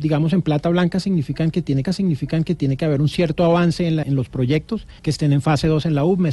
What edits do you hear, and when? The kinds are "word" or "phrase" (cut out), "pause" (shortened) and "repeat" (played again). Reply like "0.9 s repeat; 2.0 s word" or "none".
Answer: 1.8 s repeat; 4.0 s word; 5.0 s pause

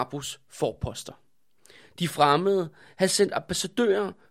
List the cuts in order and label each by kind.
none

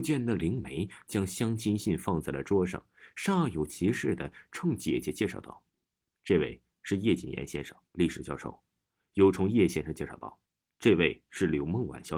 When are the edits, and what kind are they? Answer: 5.7 s pause; 7.9 s pause; 10.4 s pause

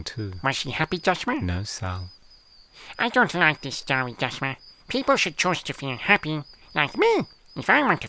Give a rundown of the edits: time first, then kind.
4.8 s pause

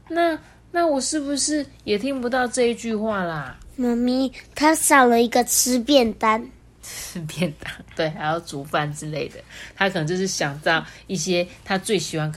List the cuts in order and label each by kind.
none

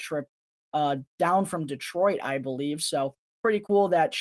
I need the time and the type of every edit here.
none

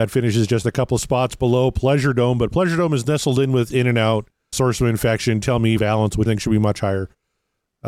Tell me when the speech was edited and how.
4.5 s word; 5.4 s word; 5.8 s word; 6.3 s word

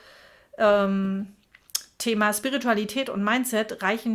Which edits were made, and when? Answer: none

